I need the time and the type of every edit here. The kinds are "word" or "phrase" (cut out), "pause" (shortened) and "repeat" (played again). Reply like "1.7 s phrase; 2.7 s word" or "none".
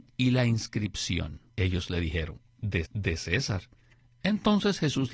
1.5 s pause; 2.8 s repeat